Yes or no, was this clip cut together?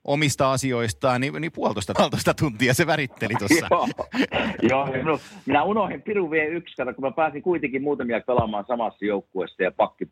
yes